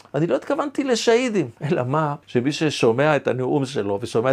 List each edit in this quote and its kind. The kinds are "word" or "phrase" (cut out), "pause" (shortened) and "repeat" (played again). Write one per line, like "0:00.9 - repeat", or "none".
0:02.2 - pause